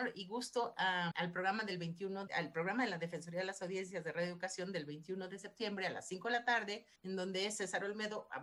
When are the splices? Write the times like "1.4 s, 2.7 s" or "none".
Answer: 1.1 s, 2.3 s, 7.0 s